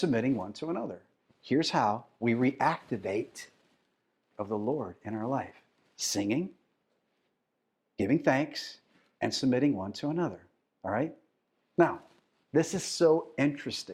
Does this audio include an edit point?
yes; 2 cuts; at 1.2 s, 4.3 s

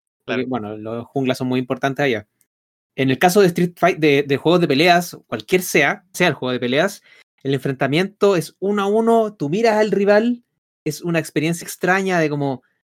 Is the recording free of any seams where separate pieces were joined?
no; 2 cuts; at 6.1 s, 11.6 s

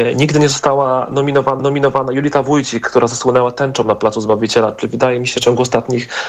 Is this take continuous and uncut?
no; 2 cuts; at 1.6 s, 5.4 s

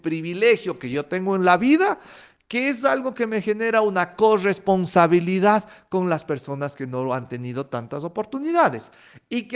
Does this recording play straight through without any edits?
yes; 0 cuts

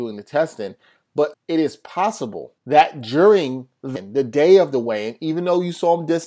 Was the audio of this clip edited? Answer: yes; 3 cuts; at 1.3 s, 2.6 s, 4.0 s

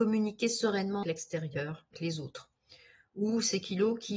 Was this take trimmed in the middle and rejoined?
yes; 2 cuts; at 1.0 s, 1.9 s

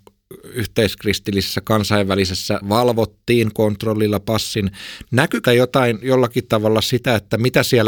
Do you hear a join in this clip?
yes; 2 cuts; at 2.6 s, 5.5 s

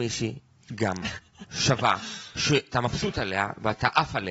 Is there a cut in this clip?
yes; 1 cut; at 2.7 s

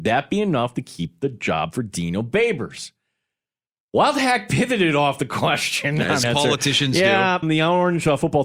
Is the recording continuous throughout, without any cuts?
no; 2 cuts; at 6.2 s, 7.4 s

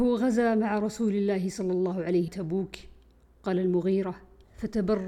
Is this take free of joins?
no; 1 cut; at 2.3 s

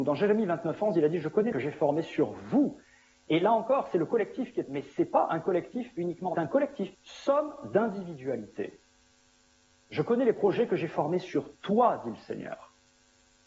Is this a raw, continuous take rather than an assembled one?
no; 4 cuts; at 1.5 s, 4.7 s, 6.3 s, 6.9 s

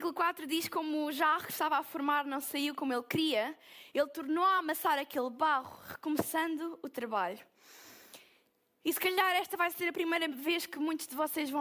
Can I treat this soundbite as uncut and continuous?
yes; 0 cuts

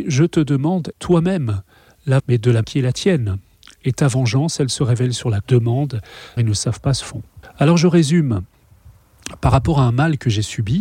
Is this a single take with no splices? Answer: no; 7 cuts; at 0.9 s, 2.2 s, 2.6 s, 5.4 s, 6.4 s, 7.0 s, 7.4 s

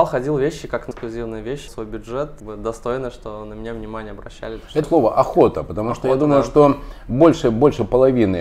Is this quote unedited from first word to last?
no; 4 cuts; at 0.9 s, 1.7 s, 2.4 s, 4.8 s

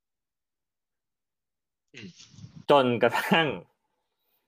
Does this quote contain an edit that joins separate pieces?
yes; 1 cut; at 2.6 s

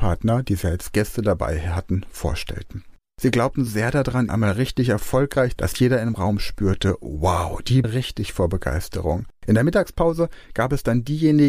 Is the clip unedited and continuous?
no; 5 cuts; at 3.0 s, 3.7 s, 4.3 s, 5.6 s, 7.8 s

